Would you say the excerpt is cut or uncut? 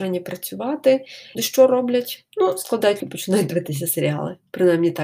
cut